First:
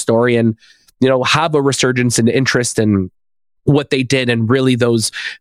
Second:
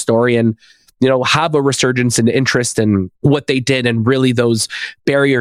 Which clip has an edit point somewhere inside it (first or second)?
second